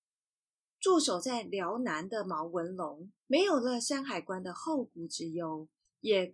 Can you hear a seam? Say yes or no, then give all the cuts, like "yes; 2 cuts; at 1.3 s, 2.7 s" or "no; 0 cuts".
yes; 1 cut; at 3.2 s